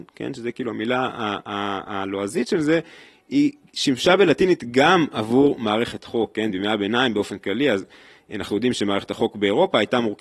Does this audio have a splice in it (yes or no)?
no